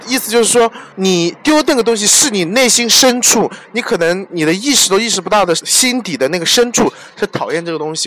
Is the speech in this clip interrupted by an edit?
yes; 2 cuts; at 0.9 s, 5.6 s

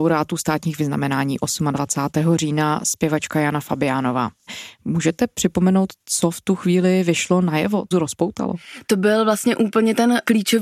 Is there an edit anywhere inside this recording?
yes; 1 cut; at 7.9 s

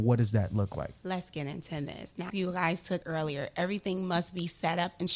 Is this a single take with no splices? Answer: no; 3 cuts; at 1.0 s, 2.3 s, 3.0 s

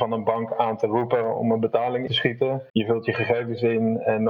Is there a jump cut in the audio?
yes; 3 cuts; at 1.4 s, 2.1 s, 2.7 s

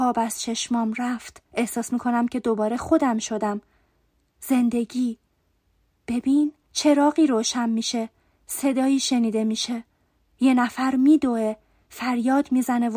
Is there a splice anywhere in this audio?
yes; 2 cuts; at 1.4 s, 6.6 s

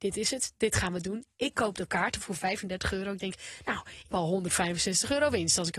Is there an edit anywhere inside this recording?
yes; 2 cuts; at 1.9 s, 4.1 s

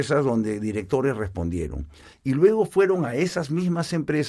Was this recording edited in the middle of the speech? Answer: no; 0 cuts

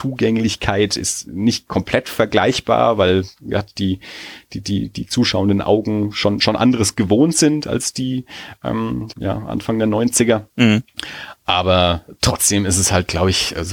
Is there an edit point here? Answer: yes; 2 cuts; at 9.1 s, 10.5 s

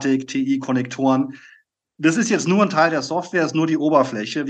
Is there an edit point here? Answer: no; 0 cuts

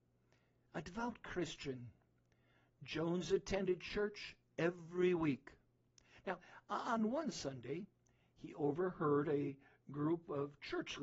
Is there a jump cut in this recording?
no; 0 cuts

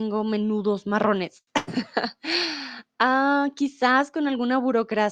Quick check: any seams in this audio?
no; 0 cuts

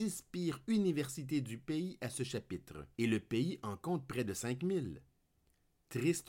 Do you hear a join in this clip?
yes; 1 cut; at 2.9 s

